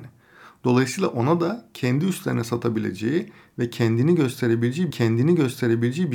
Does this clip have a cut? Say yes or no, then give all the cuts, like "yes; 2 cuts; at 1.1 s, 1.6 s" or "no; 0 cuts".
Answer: yes; 1 cut; at 4.9 s